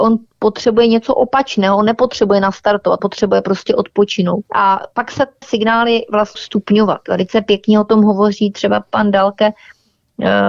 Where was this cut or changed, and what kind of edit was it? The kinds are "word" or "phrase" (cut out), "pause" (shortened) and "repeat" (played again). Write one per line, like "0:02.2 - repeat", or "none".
0:03.0 - word
0:04.5 - pause
0:05.4 - phrase
0:06.3 - phrase